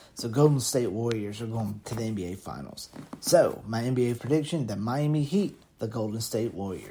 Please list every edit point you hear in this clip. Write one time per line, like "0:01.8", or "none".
0:01.8
0:04.2
0:05.6